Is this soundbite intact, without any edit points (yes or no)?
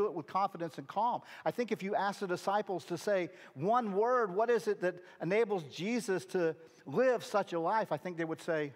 yes